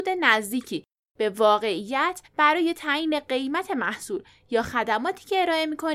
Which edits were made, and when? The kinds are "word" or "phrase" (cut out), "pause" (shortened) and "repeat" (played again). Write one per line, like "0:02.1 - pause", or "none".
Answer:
0:02.3 - pause